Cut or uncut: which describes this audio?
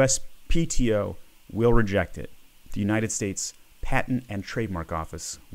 uncut